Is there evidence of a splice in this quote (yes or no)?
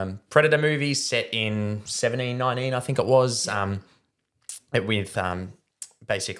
no